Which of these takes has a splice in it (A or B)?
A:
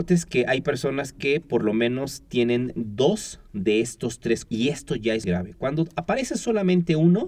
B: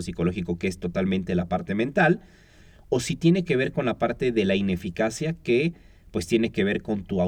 A